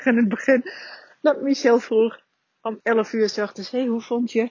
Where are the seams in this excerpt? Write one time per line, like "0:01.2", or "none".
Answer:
none